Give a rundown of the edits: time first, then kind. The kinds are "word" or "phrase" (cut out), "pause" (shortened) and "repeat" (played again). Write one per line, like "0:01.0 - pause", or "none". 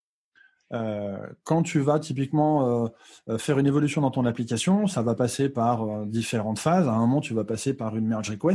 none